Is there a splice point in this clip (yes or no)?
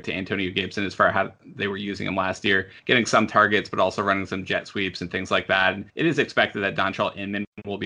yes